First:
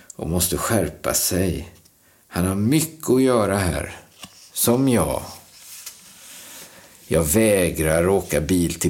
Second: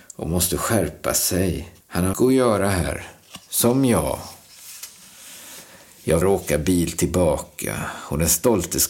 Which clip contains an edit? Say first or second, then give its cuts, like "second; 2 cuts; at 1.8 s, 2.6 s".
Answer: second; 4 cuts; at 1.8 s, 2.1 s, 3.4 s, 6.2 s